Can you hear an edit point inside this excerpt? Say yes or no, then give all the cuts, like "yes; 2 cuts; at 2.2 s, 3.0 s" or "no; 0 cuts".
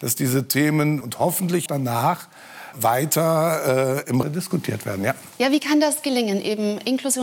yes; 4 cuts; at 1.0 s, 1.7 s, 2.7 s, 4.2 s